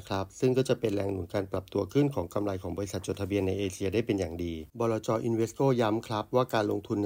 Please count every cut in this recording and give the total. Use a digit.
1